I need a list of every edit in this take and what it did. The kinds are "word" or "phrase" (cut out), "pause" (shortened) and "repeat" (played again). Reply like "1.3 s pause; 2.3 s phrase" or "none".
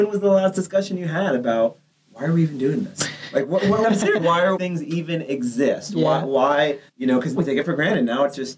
1.9 s pause; 3.8 s word; 4.2 s word; 4.6 s phrase; 6.9 s pause; 7.4 s word